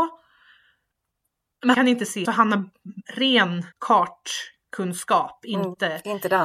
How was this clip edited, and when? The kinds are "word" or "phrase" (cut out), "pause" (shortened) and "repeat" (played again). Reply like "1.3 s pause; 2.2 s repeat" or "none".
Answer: 1.7 s word; 2.2 s phrase; 3.7 s pause

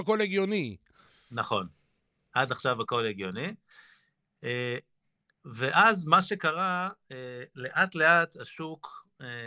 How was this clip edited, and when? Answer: none

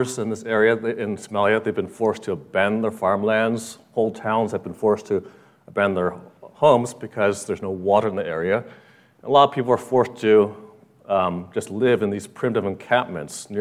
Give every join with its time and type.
none

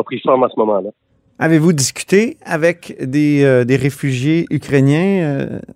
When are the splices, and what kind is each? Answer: none

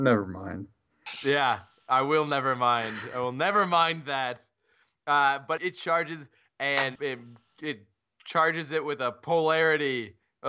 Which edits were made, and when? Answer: 5.6 s word; 7.0 s word

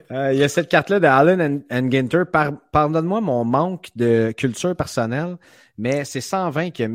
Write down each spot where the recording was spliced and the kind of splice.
none

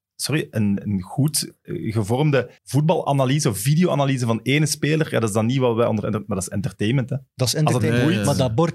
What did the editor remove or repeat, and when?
2.6 s pause

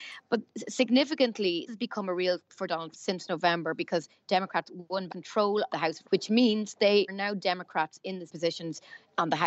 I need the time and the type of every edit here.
1.7 s word; 2.4 s word; 2.9 s word; 5.1 s word; 5.7 s word; 6.0 s word; 7.1 s word; 8.3 s word

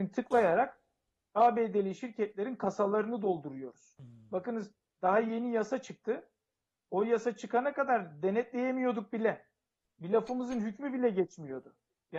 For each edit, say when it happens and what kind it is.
none

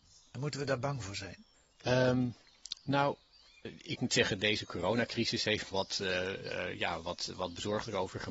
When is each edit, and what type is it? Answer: 1.5 s pause; 3.6 s word; 5.7 s phrase

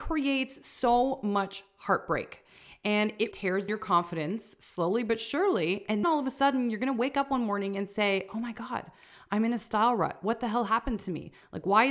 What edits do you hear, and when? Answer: 3.3 s word; 3.7 s word; 6.0 s word

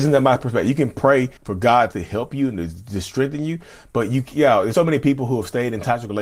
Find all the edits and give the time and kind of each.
1.4 s pause; 1.9 s word; 4.7 s word

